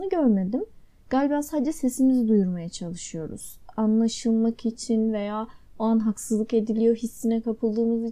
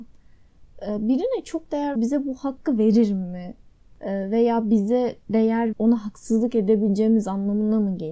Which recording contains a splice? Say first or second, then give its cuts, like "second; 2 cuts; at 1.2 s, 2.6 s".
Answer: second; 2 cuts; at 2.0 s, 5.7 s